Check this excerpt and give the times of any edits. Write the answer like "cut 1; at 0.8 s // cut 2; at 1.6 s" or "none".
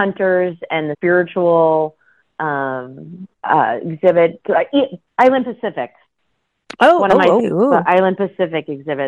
cut 1; at 0.9 s // cut 2; at 3.3 s // cut 3; at 5.1 s // cut 4; at 7.4 s

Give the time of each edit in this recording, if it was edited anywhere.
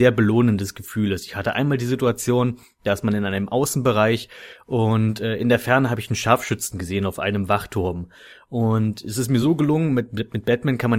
none

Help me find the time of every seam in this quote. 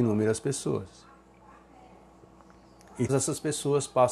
cut 1; at 3.1 s

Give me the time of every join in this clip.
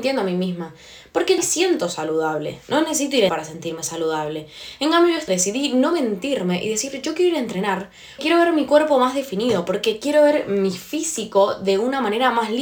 cut 1; at 1.4 s // cut 2; at 3.3 s // cut 3; at 5.3 s // cut 4; at 8.2 s

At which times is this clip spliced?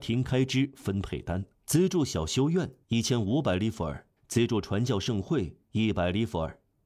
cut 1; at 1.5 s // cut 2; at 2.8 s // cut 3; at 4.2 s

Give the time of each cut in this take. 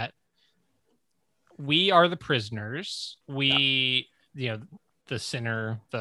cut 1; at 3.2 s

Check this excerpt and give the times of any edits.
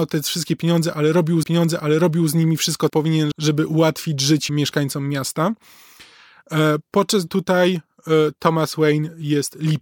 cut 1; at 1.4 s // cut 2; at 2.9 s // cut 3; at 3.3 s // cut 4; at 4.5 s // cut 5; at 7.3 s

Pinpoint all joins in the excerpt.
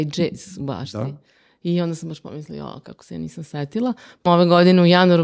cut 1; at 4.3 s

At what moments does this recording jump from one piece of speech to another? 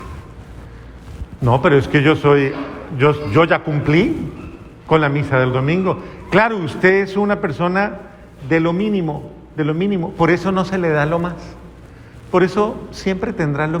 none

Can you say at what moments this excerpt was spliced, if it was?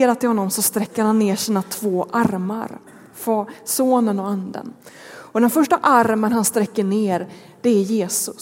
none

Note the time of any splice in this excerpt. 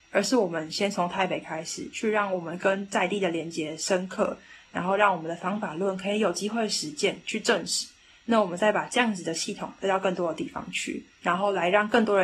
none

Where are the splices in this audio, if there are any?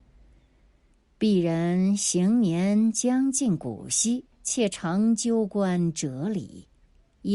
cut 1; at 4.3 s

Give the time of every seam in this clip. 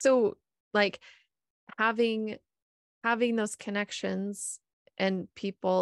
cut 1; at 2.8 s

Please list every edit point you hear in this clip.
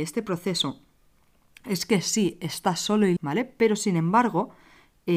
cut 1; at 3.2 s

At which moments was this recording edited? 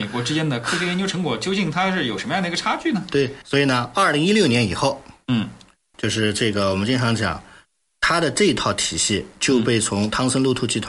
cut 1; at 3.4 s // cut 2; at 5.9 s // cut 3; at 7.8 s

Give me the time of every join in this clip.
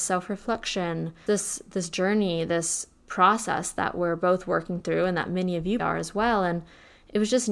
cut 1; at 1.3 s // cut 2; at 5.8 s

